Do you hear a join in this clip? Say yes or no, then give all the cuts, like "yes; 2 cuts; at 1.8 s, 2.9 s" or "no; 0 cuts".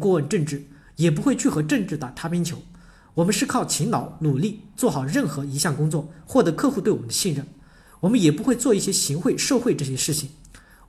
no; 0 cuts